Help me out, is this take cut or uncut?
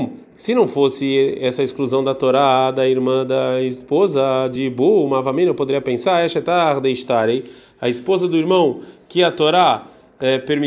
uncut